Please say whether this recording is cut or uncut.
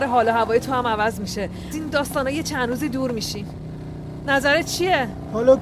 cut